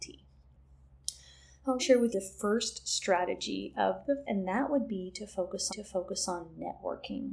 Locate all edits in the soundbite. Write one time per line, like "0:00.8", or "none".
0:01.8
0:02.1
0:04.3
0:05.7

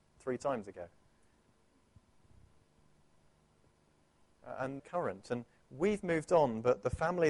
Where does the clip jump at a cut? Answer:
0:04.8

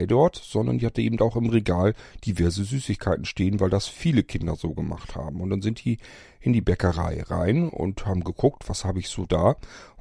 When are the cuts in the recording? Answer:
none

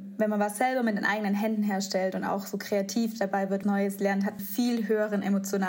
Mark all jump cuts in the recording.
0:03.6
0:04.4

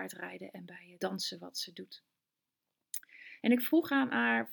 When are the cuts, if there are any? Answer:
0:01.0

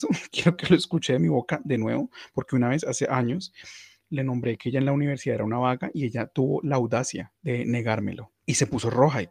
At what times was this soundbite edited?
0:07.4

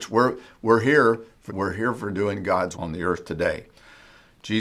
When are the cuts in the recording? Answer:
0:01.5
0:02.7

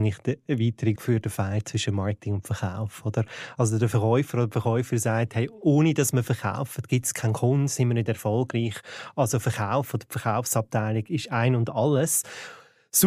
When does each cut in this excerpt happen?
0:01.0

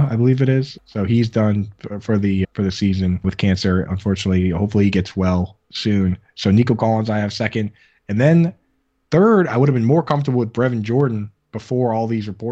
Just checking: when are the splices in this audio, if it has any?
none

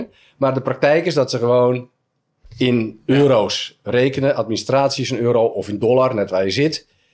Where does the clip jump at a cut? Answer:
none

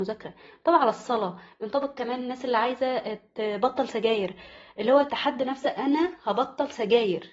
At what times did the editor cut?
none

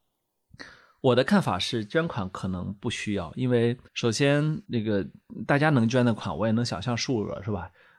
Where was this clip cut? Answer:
0:03.9
0:04.6

